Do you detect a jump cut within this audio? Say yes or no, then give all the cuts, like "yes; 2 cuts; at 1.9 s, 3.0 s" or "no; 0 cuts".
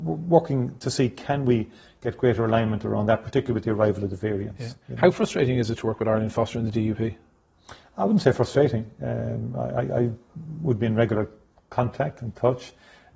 no; 0 cuts